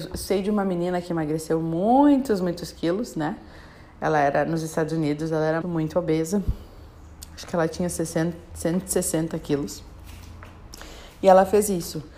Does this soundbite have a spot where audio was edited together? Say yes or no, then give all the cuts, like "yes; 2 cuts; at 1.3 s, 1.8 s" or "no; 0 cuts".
yes; 1 cut; at 5.6 s